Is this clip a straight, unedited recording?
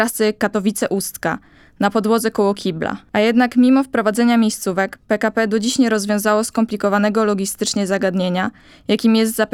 no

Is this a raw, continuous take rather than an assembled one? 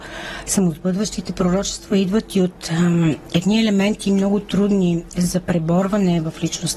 yes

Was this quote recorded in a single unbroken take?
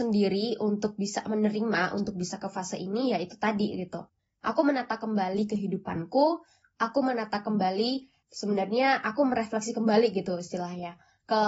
yes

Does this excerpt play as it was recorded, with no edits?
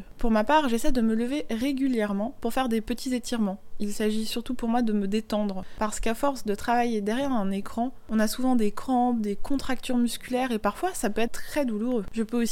no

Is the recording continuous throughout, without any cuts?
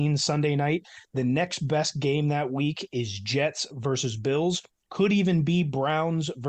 yes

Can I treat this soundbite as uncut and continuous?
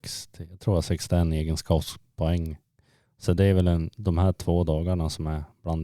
yes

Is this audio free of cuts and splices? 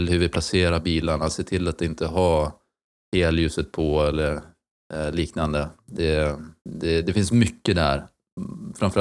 no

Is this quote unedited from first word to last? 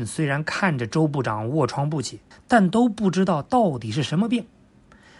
no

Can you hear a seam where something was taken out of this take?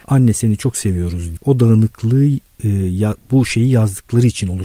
yes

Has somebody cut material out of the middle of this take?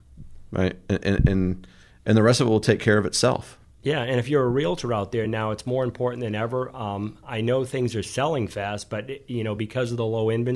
no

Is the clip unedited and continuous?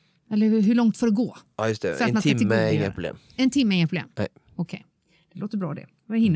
yes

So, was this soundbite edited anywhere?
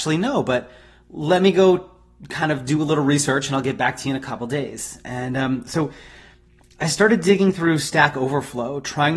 no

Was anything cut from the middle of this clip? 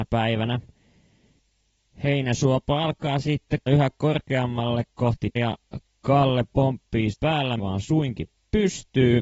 yes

